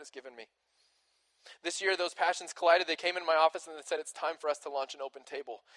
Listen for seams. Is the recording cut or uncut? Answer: uncut